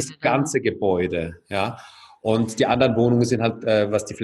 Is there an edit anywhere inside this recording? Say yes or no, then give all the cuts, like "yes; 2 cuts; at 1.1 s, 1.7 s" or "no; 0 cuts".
no; 0 cuts